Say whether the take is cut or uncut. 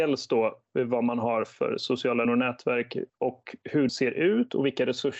cut